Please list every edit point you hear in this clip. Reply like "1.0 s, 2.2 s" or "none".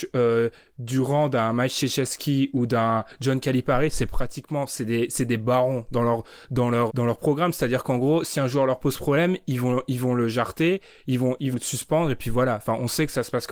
6.9 s, 11.5 s

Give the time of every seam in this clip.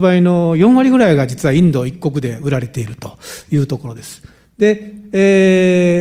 none

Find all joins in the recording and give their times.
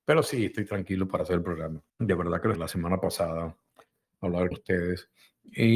1.9 s, 2.6 s, 4.5 s

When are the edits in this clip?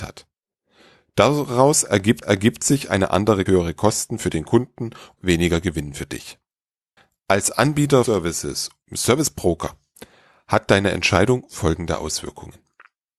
2.2 s, 3.5 s, 5.2 s, 7.0 s, 8.0 s, 8.8 s

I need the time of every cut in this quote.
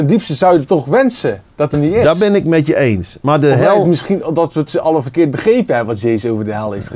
1.7 s, 4.7 s

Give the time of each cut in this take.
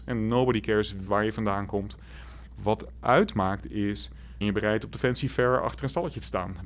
1.1 s, 4.4 s

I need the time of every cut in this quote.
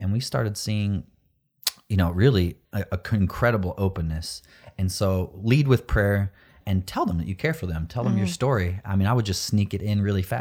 2.6 s, 6.6 s

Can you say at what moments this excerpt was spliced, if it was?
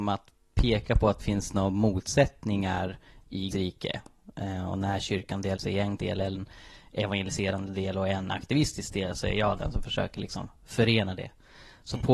1.2 s, 3.5 s, 5.6 s, 6.0 s

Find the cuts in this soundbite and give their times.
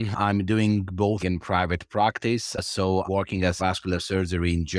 1.2 s, 3.0 s, 3.6 s

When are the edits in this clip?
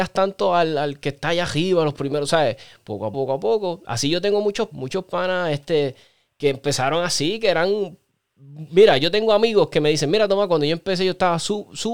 3.1 s, 4.7 s

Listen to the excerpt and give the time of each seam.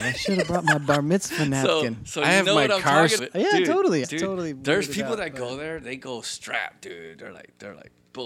3.2 s, 4.0 s

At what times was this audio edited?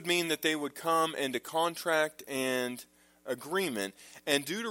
none

